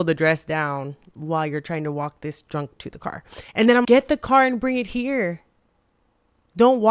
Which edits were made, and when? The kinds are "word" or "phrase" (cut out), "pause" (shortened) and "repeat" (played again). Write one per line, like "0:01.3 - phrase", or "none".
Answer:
0:02.8 - word
0:03.5 - pause
0:03.8 - word